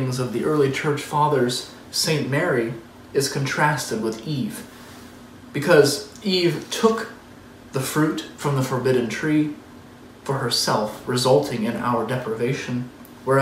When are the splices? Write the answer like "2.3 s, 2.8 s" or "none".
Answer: none